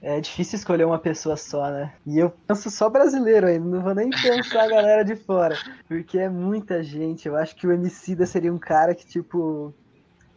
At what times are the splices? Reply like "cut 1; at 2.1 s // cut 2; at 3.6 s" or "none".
cut 1; at 2.0 s // cut 2; at 5.8 s